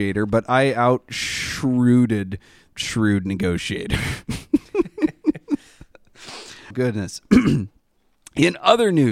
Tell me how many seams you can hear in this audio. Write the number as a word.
two